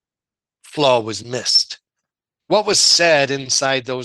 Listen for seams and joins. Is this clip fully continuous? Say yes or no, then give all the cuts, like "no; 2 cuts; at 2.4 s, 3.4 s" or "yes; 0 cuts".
yes; 0 cuts